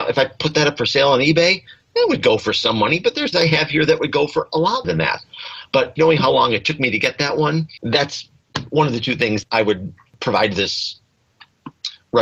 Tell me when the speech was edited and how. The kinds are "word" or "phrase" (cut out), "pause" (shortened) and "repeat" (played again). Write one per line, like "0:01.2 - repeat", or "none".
0:03.3 - word
0:04.8 - word
0:06.0 - word
0:09.4 - word